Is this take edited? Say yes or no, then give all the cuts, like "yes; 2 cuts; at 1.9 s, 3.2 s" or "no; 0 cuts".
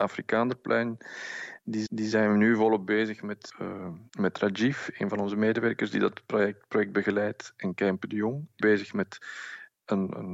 yes; 4 cuts; at 1.9 s, 3.5 s, 4.1 s, 8.6 s